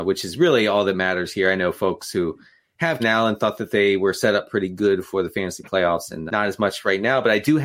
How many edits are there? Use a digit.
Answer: 2